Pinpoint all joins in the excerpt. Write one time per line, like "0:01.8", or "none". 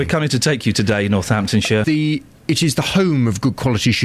0:01.8